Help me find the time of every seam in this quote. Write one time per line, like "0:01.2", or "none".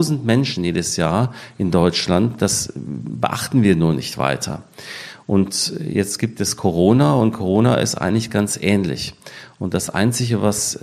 none